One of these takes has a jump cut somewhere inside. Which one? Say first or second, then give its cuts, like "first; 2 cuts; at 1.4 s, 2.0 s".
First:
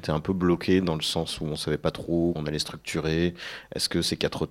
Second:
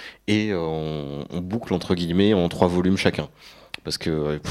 first; 1 cut; at 2.4 s